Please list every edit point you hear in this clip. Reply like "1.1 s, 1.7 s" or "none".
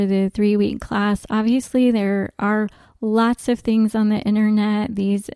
none